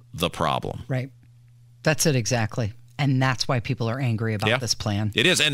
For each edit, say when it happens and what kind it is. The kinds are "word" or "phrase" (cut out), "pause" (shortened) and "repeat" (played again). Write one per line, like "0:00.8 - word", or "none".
none